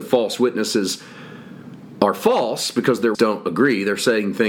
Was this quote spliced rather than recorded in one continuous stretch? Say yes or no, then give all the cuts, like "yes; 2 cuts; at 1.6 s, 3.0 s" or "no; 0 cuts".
yes; 1 cut; at 3.1 s